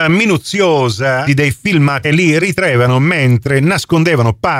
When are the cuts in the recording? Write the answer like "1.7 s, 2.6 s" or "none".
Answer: 1.3 s, 2.0 s

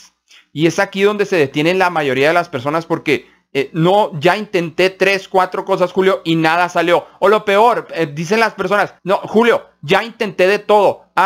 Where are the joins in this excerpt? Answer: 7.9 s, 9.0 s

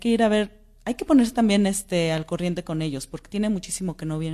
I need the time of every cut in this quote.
none

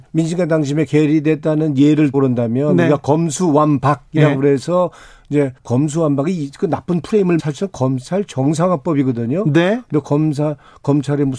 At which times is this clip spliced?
2.1 s, 5.6 s, 7.4 s

